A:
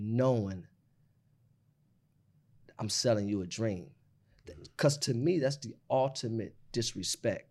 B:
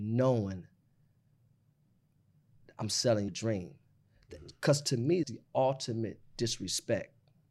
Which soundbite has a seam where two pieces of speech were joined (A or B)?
B